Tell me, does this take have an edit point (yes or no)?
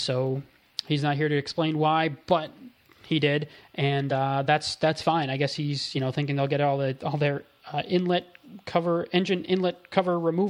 no